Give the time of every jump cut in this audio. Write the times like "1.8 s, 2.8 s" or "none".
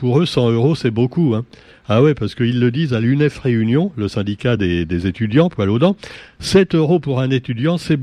none